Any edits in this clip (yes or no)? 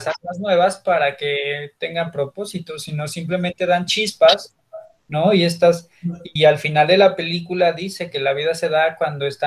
yes